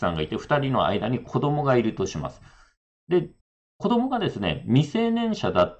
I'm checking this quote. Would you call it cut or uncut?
cut